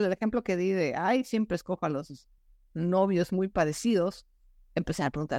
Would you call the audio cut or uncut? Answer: uncut